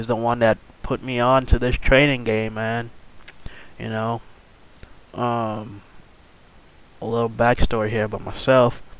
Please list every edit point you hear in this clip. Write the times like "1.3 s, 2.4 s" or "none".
none